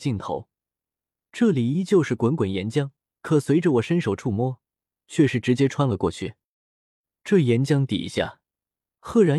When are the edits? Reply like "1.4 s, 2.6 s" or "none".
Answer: 3.0 s